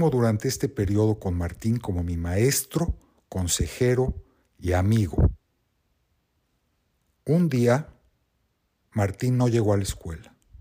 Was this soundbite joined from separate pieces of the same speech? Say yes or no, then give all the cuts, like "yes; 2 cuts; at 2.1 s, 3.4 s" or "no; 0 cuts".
no; 0 cuts